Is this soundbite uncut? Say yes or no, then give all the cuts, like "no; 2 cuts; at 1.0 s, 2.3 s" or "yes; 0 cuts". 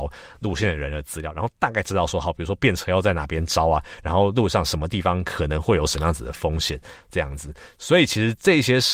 yes; 0 cuts